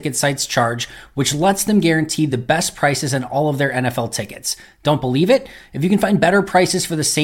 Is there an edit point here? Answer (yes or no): no